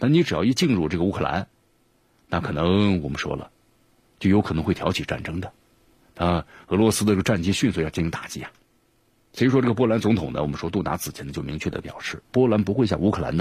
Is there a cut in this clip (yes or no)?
yes